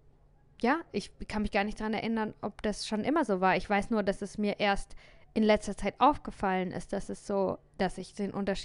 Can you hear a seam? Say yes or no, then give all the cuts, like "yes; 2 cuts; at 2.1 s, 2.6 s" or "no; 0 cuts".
no; 0 cuts